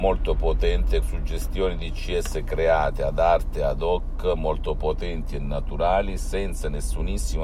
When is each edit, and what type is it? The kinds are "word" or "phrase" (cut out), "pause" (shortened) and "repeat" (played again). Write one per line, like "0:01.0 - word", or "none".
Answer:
0:01.0 - word